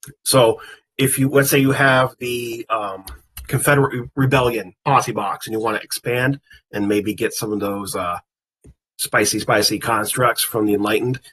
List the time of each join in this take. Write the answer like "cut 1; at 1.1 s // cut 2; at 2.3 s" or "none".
none